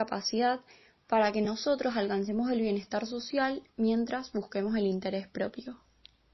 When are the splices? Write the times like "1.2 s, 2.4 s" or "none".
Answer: none